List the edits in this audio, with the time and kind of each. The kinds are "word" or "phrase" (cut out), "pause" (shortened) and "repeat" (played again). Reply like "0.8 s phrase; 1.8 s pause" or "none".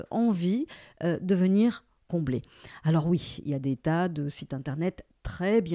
none